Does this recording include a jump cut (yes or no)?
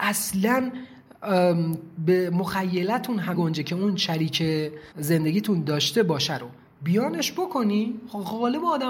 yes